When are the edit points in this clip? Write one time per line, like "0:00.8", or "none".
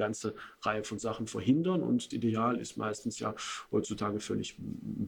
0:02.1